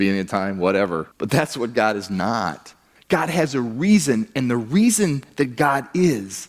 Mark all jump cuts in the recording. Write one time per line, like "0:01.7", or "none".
0:01.1
0:03.0